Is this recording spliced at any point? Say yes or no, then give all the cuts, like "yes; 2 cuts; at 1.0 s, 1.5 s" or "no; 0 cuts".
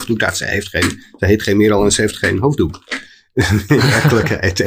no; 0 cuts